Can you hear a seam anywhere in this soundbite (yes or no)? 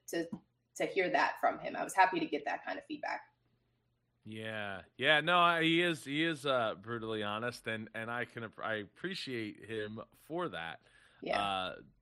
no